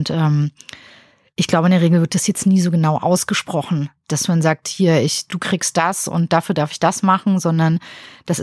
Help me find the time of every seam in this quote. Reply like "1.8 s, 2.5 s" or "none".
4.1 s, 5.3 s